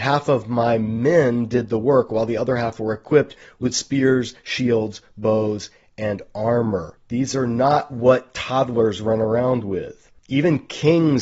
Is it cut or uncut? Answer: uncut